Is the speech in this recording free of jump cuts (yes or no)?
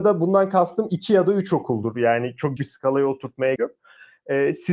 no